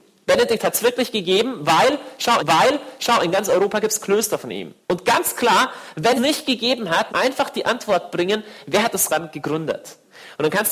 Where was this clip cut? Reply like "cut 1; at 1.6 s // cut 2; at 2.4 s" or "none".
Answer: cut 1; at 2.4 s // cut 2; at 4.8 s // cut 3; at 6.2 s // cut 4; at 7.1 s // cut 5; at 9.1 s